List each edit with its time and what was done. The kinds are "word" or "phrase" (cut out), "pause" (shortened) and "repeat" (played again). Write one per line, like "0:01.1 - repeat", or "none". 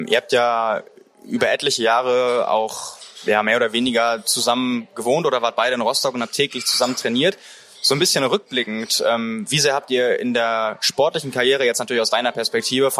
none